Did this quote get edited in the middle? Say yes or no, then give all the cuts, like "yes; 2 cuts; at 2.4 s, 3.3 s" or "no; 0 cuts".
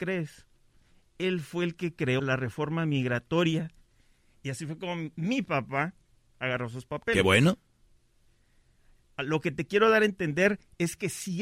yes; 1 cut; at 2.2 s